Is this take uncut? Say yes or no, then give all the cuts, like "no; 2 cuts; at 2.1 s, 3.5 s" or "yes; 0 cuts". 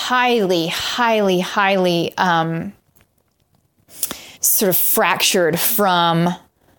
no; 1 cut; at 4.3 s